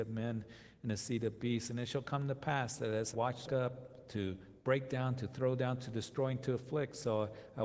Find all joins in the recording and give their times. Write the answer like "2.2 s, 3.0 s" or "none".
3.1 s, 3.5 s